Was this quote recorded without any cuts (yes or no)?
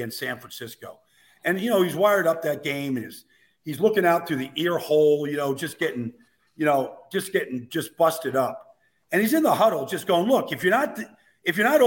yes